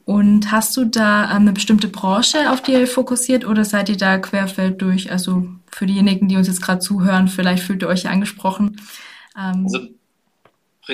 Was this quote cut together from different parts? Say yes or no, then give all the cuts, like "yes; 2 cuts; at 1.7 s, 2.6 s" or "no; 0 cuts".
no; 0 cuts